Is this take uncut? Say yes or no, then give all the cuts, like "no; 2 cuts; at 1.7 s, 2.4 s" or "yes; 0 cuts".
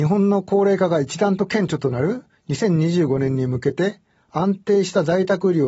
yes; 0 cuts